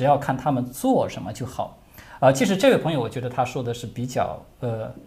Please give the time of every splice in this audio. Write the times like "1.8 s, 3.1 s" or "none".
none